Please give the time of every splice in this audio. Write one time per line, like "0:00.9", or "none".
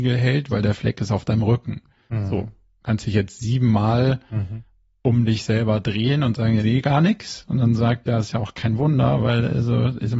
0:06.6
0:08.0